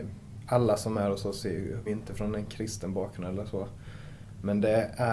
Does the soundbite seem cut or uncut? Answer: cut